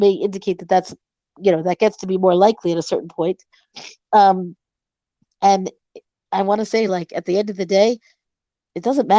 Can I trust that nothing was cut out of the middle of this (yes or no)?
yes